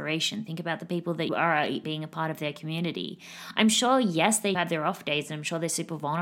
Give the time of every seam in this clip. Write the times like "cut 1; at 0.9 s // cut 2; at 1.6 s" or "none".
cut 1; at 1.3 s // cut 2; at 1.8 s // cut 3; at 4.5 s